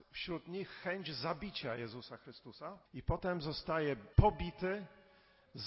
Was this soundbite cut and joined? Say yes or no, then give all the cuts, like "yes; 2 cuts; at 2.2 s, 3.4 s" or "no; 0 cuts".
yes; 2 cuts; at 2.9 s, 4.1 s